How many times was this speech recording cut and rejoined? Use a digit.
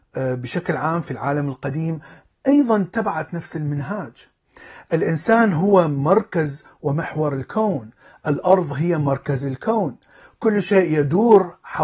0